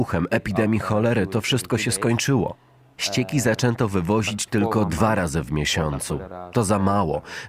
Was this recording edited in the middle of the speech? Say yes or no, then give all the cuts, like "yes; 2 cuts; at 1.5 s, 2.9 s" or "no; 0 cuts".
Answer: no; 0 cuts